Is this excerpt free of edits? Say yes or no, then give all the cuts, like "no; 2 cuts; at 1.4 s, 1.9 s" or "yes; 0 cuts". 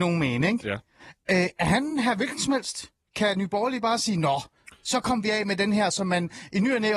yes; 0 cuts